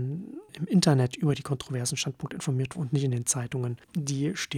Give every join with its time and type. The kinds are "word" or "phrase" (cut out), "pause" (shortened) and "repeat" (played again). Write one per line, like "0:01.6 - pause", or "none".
0:02.7 - word